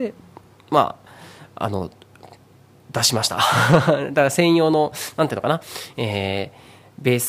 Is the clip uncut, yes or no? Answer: yes